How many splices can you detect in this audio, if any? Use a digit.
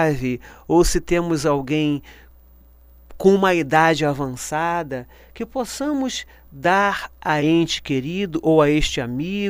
1